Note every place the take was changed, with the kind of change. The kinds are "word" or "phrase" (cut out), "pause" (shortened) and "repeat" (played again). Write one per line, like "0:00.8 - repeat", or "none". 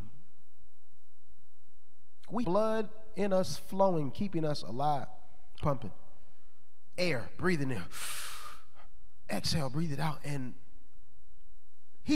0:02.4 - word
0:05.6 - word